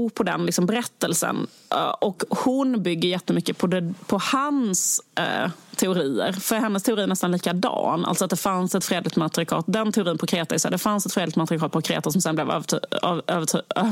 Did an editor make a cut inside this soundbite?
no; 0 cuts

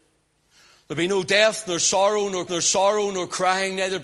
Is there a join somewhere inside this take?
yes; 1 cut; at 2.5 s

